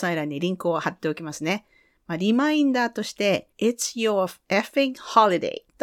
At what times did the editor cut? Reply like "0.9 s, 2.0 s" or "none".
3.5 s

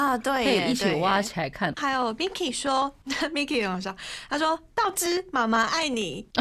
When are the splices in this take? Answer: none

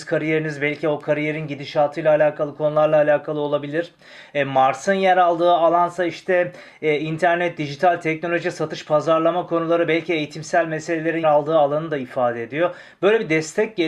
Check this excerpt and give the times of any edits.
11.2 s

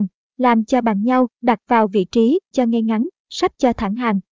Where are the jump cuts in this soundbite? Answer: 1.3 s, 2.5 s

